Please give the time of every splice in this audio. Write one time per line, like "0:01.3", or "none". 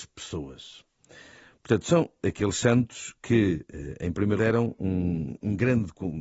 0:02.2
0:04.4

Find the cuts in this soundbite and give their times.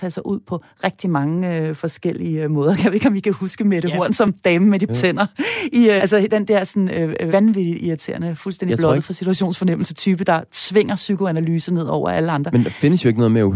0:04.9
0:06.0
0:07.3

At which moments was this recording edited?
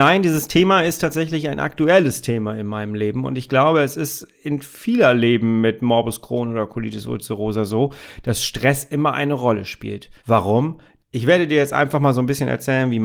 0:10.2

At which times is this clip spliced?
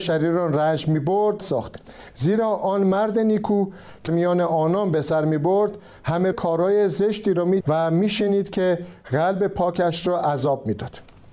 0:01.4
0:04.1
0:06.3
0:07.6

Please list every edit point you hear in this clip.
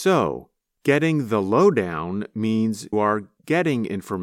0:02.9

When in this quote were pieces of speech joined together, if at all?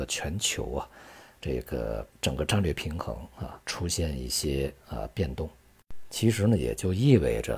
0:02.1
0:03.6

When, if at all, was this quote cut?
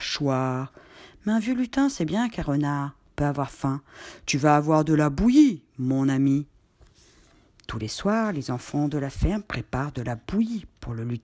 none

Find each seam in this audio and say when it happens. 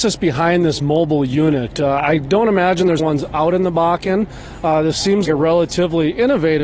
0:03.0
0:05.2

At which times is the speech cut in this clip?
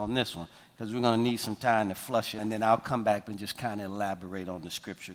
0:02.4
0:03.2

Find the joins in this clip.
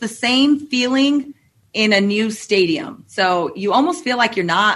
none

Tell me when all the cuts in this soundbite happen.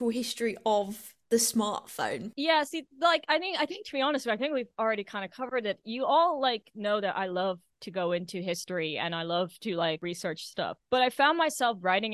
none

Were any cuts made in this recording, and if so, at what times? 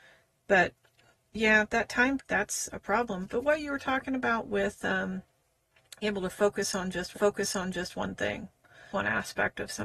0:02.2
0:06.0
0:07.1
0:08.9

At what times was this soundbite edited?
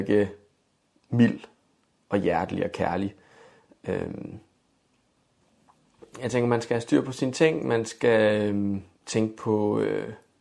0:08.9

